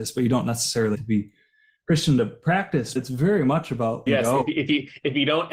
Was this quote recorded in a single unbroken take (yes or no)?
no